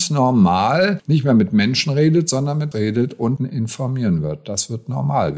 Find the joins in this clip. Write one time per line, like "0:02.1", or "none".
0:02.7
0:03.4

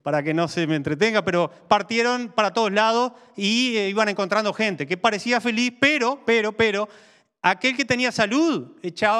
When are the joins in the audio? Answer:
none

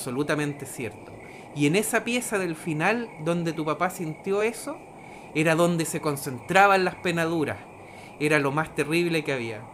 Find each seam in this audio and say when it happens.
none

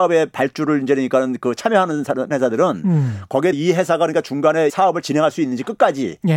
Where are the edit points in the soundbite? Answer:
0:02.3
0:03.5
0:04.7
0:05.0

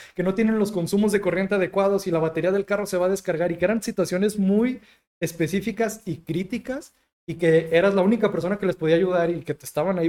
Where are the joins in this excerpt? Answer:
none

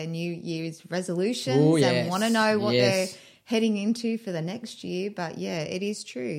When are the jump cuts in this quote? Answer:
none

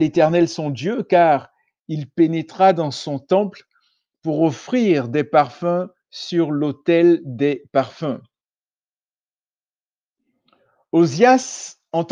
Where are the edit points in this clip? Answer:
none

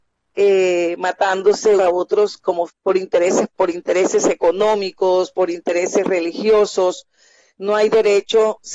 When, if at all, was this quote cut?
0:01.8
0:02.7
0:03.5

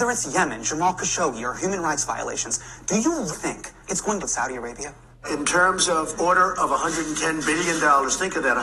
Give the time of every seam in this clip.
0:03.3
0:03.8
0:04.2
0:06.1

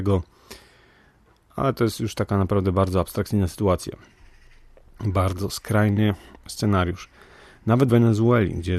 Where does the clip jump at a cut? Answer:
0:07.9

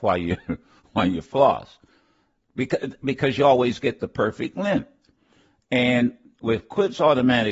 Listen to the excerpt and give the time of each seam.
none

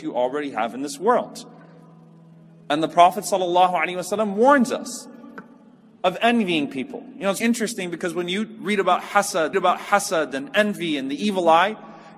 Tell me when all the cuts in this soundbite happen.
0:07.4
0:09.5

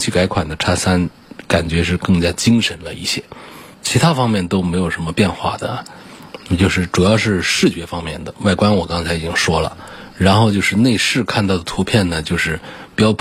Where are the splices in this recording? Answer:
0:03.7

